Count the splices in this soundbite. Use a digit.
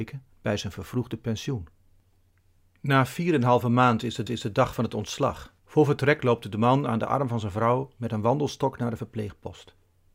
2